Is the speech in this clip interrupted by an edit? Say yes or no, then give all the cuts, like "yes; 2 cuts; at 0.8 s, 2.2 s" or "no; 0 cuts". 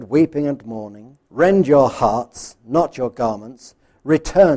yes; 1 cut; at 1.2 s